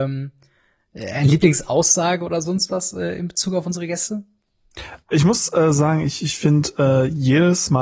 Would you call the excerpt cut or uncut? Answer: uncut